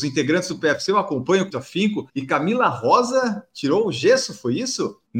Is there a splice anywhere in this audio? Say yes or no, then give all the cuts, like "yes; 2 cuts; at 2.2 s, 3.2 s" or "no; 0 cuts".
yes; 1 cut; at 1.5 s